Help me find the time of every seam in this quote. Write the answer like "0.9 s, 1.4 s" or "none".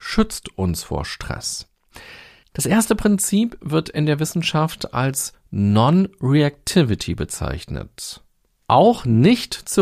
none